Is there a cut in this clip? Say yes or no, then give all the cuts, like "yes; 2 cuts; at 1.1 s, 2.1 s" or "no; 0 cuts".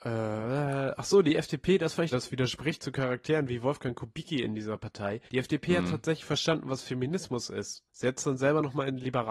yes; 3 cuts; at 2.1 s, 5.3 s, 7.9 s